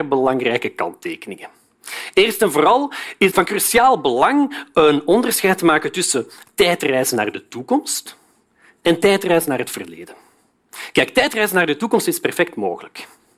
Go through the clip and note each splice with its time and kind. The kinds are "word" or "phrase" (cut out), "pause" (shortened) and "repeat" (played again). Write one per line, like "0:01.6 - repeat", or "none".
0:03.3 - word